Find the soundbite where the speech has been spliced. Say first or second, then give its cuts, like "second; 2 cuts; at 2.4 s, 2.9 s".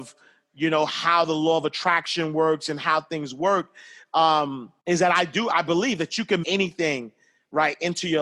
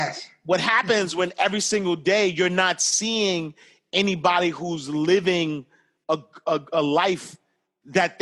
first; 2 cuts; at 4.8 s, 6.4 s